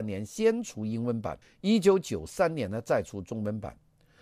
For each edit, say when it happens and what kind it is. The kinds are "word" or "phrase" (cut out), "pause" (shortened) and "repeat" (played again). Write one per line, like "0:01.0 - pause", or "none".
0:01.4 - pause